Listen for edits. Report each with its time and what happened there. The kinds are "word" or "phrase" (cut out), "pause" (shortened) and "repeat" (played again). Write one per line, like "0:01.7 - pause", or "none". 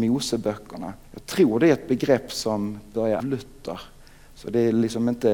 0:01.0 - pause
0:03.2 - phrase